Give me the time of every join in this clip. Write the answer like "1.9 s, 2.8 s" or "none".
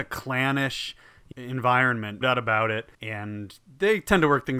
1.3 s, 2.2 s, 2.9 s